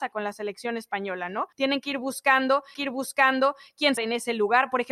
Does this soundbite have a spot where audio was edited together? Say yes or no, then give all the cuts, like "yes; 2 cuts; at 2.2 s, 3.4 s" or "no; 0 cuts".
yes; 3 cuts; at 1.5 s, 2.7 s, 4.0 s